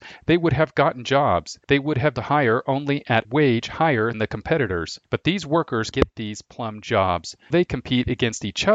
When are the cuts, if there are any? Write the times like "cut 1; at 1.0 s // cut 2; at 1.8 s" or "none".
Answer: cut 1; at 1.6 s // cut 2; at 2.1 s // cut 3; at 3.2 s // cut 4; at 4.1 s // cut 5; at 5.1 s // cut 6; at 5.9 s // cut 7; at 7.5 s